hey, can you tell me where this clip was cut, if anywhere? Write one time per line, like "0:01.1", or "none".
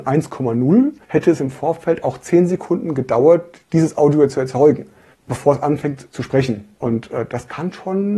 0:01.0
0:05.1
0:06.7